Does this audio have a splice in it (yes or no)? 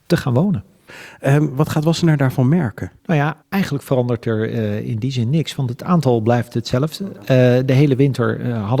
yes